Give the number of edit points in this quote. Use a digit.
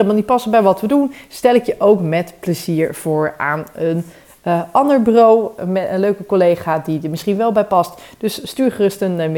0